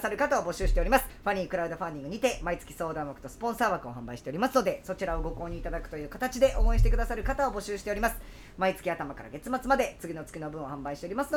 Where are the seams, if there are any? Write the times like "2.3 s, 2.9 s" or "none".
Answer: 1.1 s